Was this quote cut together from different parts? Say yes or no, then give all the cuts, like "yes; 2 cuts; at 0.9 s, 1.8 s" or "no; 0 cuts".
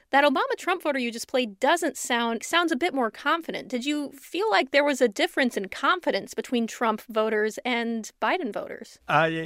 yes; 1 cut; at 2.4 s